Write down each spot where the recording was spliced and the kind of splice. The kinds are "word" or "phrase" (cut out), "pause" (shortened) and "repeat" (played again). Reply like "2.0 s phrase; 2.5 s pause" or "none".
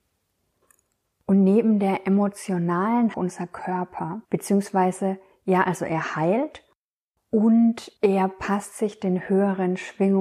3.1 s phrase